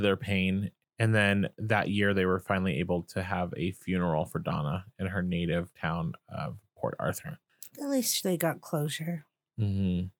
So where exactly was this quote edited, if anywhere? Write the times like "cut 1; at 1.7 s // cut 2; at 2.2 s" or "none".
cut 1; at 5.7 s